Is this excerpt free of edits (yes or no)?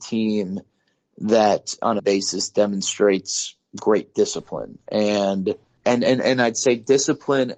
no